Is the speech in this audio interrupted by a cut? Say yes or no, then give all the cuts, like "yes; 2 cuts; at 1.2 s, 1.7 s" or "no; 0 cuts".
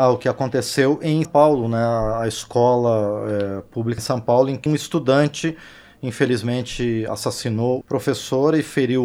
yes; 4 cuts; at 1.2 s, 4.0 s, 4.7 s, 7.8 s